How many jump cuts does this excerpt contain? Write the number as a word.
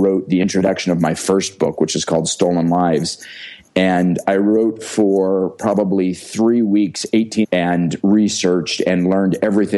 one